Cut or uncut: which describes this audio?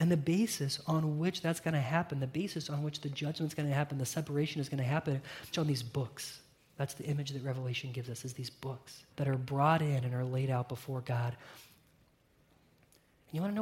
cut